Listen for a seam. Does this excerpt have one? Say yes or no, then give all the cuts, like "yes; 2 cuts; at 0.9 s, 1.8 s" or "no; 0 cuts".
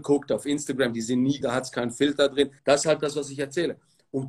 yes; 2 cuts; at 1.4 s, 2.6 s